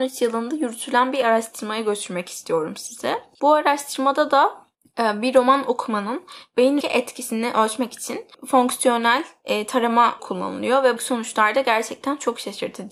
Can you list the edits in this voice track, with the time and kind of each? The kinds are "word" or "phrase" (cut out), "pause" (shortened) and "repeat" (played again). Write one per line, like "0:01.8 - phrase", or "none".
0:06.8 - word
0:10.2 - word
0:11.0 - word

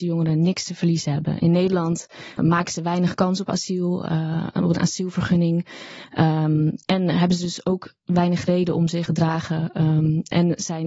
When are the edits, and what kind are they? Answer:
0:02.4 - word
0:06.8 - pause
0:09.1 - phrase

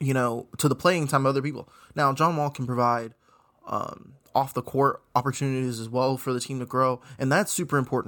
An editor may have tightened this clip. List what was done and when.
none

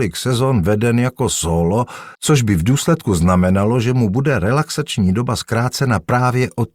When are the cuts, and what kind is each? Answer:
0:02.1 - pause

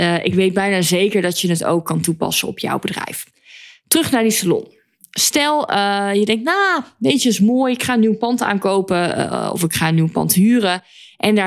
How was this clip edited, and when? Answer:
none

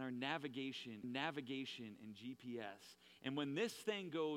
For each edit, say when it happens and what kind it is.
0:01.0 - repeat

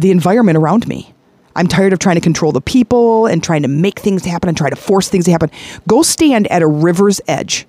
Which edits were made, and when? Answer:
none

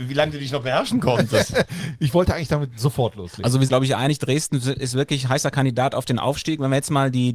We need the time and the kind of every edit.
0:03.7 - phrase

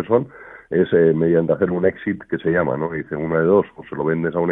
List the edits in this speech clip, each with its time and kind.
none

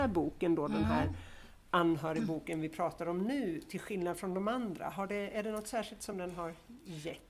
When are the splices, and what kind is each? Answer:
none

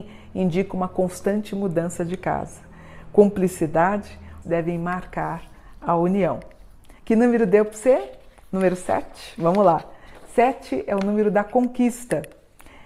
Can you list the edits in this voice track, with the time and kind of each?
0:04.4 - phrase
0:07.0 - pause

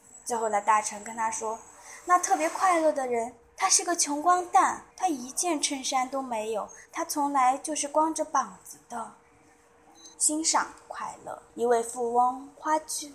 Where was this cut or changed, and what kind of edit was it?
0:04.9 - pause
0:06.8 - pause
0:10.1 - pause
0:11.5 - pause

